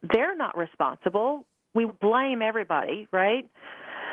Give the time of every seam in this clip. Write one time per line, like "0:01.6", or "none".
0:01.9